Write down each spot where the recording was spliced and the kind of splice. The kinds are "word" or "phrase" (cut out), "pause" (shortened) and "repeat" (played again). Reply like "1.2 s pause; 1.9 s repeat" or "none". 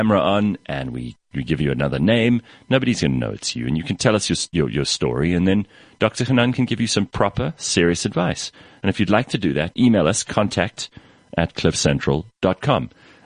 9.7 s word